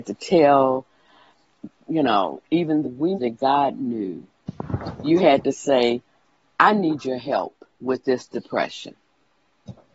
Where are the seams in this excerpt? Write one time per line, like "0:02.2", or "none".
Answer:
0:02.8
0:03.1
0:07.7